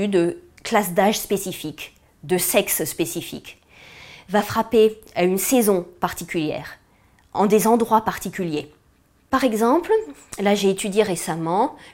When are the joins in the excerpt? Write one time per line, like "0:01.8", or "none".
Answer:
none

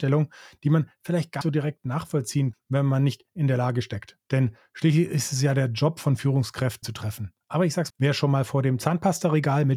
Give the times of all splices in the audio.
0:01.4
0:02.5
0:04.2
0:06.8
0:07.4
0:07.9

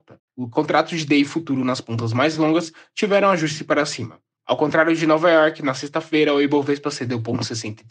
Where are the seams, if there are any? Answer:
none

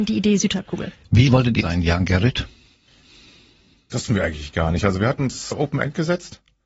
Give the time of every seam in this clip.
0:01.3
0:01.6
0:04.1
0:05.5

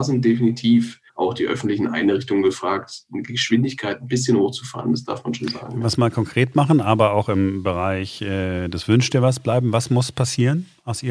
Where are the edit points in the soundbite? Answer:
0:01.1

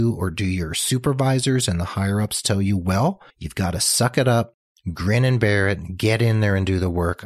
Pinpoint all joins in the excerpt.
0:03.3

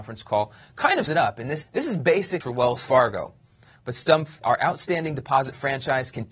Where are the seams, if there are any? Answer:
0:01.1
0:01.6
0:02.4
0:04.4

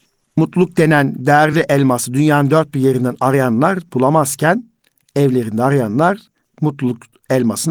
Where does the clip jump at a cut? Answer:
none

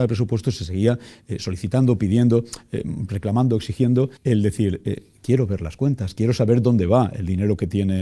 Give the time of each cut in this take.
0:04.2

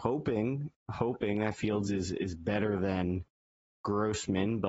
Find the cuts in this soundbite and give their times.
none

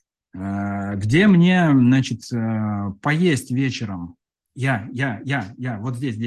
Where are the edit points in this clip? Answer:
none

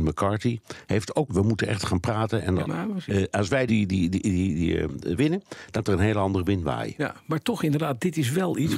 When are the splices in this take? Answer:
0:01.3
0:02.6
0:03.7
0:05.2
0:05.8

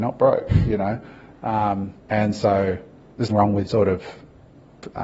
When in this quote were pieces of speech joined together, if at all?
0:02.0
0:03.3
0:03.7

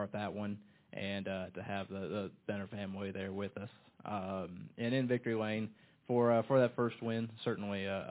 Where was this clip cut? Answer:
none

